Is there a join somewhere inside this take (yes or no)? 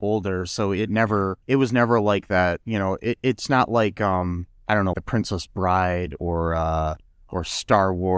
yes